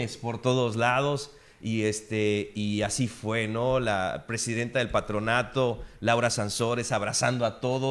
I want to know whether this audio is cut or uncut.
uncut